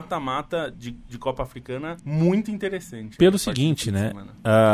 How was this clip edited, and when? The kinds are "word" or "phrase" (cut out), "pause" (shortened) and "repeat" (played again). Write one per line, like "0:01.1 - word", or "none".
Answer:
0:02.0 - pause